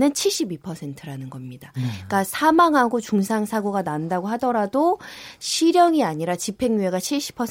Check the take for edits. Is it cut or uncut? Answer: uncut